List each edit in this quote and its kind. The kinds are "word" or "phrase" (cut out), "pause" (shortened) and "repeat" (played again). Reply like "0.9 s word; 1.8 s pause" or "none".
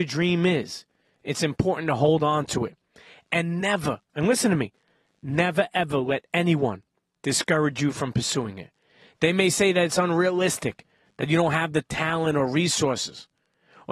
none

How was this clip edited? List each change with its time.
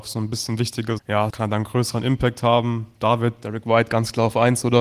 1.0 s phrase; 1.3 s phrase

